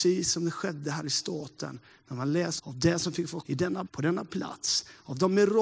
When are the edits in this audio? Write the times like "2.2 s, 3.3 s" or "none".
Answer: 2.6 s, 3.4 s, 3.9 s